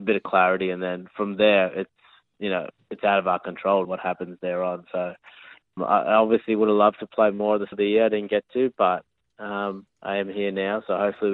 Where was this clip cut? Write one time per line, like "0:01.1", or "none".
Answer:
0:03.8
0:05.8
0:07.7